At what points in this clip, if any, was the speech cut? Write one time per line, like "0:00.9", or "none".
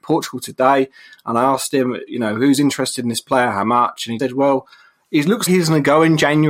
0:04.2
0:05.5

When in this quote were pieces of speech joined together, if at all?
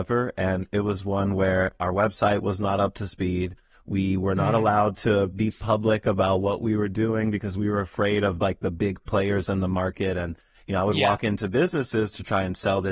none

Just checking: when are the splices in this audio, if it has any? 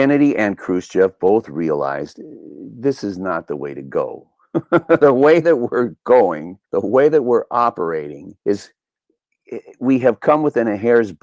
0:06.6
0:08.4

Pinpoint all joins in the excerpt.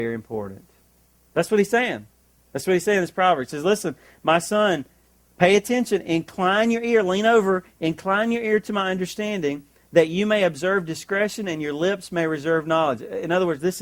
none

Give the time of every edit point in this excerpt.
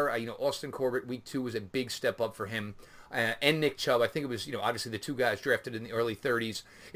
none

